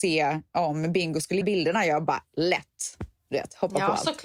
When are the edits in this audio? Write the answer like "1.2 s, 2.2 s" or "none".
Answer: 1.4 s